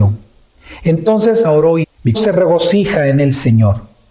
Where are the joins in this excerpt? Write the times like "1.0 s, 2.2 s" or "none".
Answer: 1.4 s, 1.8 s, 2.1 s